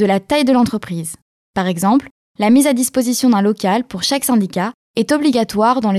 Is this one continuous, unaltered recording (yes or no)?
yes